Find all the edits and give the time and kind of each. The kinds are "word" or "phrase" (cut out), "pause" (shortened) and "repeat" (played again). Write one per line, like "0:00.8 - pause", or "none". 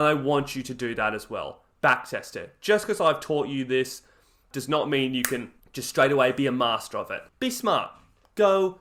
0:04.5 - word
0:05.6 - pause
0:07.3 - pause